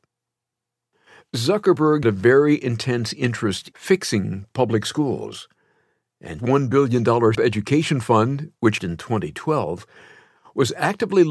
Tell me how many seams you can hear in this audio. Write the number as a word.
five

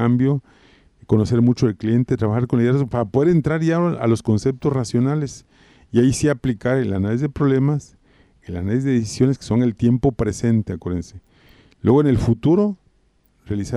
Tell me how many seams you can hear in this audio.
zero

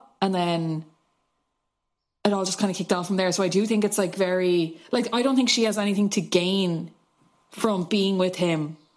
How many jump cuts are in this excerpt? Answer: zero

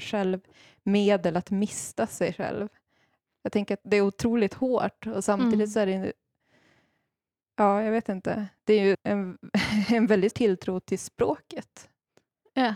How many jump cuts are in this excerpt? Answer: two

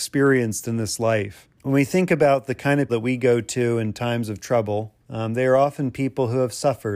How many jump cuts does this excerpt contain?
three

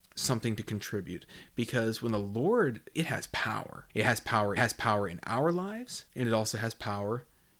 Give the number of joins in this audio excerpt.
four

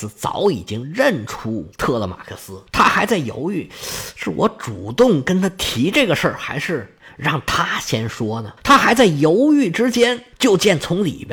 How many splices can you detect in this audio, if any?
three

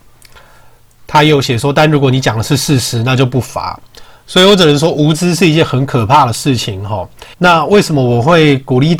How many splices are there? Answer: one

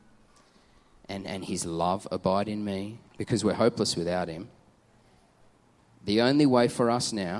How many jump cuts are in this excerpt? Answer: one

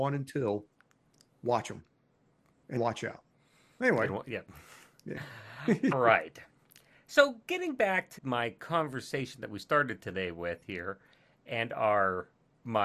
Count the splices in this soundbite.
three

